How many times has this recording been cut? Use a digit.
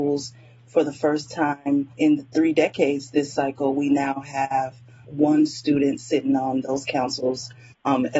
2